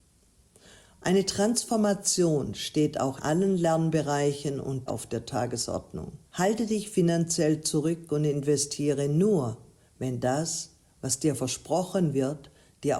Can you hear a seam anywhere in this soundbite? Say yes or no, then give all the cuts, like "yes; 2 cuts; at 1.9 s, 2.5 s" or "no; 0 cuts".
yes; 3 cuts; at 3.2 s, 4.9 s, 6.3 s